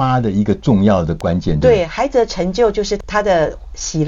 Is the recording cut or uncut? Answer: uncut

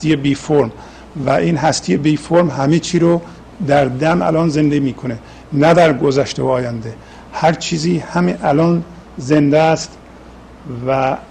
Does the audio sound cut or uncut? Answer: uncut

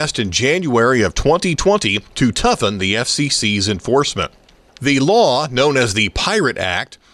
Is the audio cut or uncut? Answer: uncut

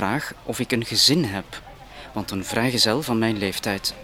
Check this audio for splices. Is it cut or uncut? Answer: uncut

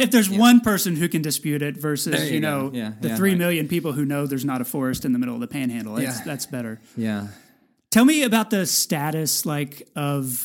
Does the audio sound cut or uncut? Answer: uncut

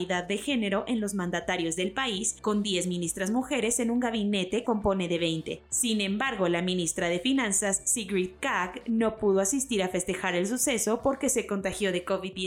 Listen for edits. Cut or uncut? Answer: cut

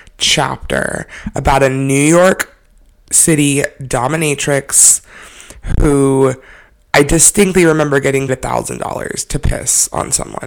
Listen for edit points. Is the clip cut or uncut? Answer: cut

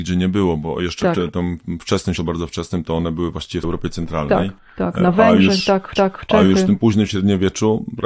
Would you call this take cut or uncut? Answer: cut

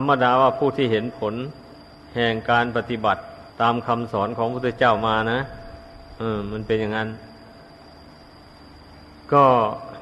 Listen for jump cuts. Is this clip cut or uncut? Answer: cut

